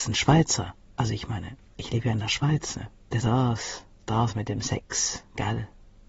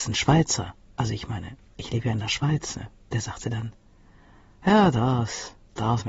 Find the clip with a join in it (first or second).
first